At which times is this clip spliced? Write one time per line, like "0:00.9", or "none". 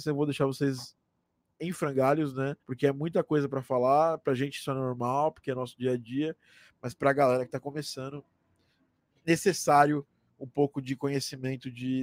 0:02.6

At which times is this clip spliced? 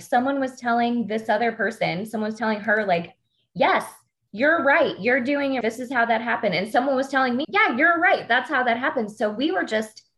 0:05.6
0:07.4

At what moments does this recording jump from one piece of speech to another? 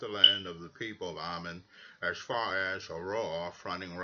none

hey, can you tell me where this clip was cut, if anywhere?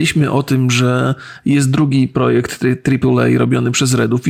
none

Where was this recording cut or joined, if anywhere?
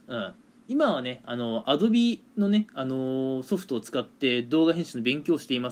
0:02.3

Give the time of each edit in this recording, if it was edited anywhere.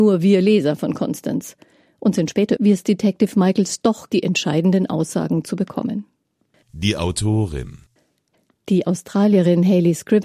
0:02.6
0:04.1

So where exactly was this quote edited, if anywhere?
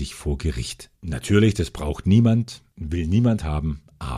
0:00.9

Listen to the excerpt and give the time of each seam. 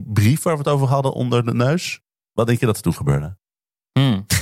0:02.2

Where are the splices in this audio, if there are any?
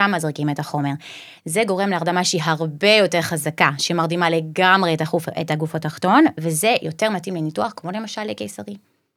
none

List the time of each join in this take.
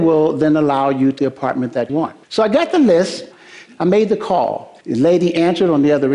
0:01.2
0:01.9
0:02.2
0:04.8

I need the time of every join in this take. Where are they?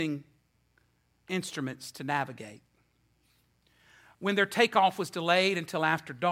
none

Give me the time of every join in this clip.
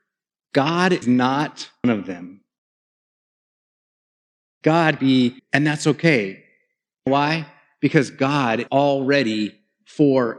0:01.0
0:01.8
0:05.0
0:05.4
0:07.1
0:08.7

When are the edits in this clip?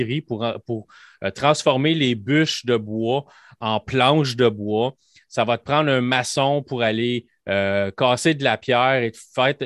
none

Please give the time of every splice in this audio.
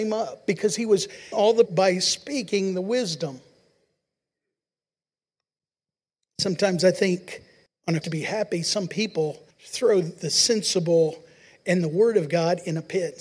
0:01.3
0:01.7
0:07.7
0:08.0
0:09.5

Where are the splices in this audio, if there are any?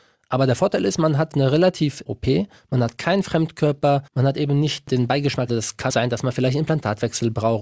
0:01.3
0:02.1
0:04.1
0:05.5
0:05.9

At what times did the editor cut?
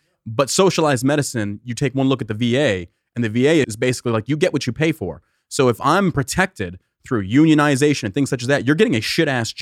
0:03.6

